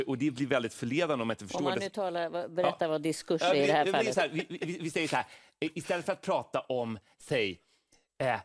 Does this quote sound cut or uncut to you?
uncut